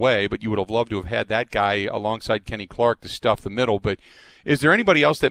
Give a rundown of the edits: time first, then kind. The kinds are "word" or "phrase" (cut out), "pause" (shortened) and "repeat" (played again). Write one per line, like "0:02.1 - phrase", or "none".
none